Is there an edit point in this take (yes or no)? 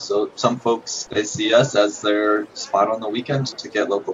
no